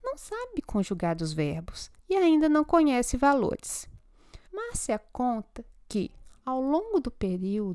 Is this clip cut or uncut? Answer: cut